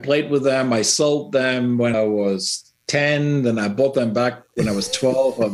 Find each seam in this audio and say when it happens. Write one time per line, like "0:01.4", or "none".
0:01.9